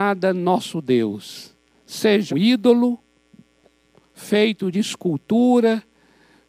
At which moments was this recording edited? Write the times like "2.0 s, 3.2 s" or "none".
2.3 s, 4.7 s